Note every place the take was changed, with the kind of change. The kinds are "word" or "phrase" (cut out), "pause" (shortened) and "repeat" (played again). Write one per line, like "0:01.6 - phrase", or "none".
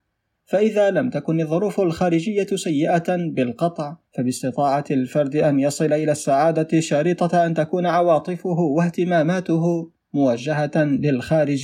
0:04.1 - pause